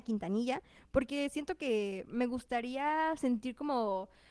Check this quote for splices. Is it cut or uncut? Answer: uncut